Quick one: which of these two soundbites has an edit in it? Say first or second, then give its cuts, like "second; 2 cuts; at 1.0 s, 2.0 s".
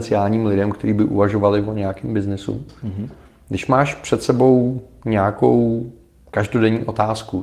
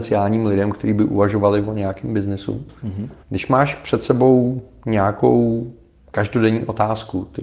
second; 1 cut; at 3.2 s